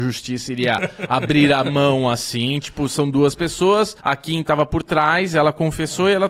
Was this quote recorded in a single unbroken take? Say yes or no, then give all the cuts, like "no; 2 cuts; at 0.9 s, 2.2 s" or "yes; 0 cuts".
no; 1 cut; at 4.0 s